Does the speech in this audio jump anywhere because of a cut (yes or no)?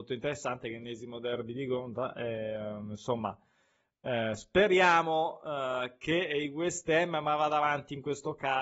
no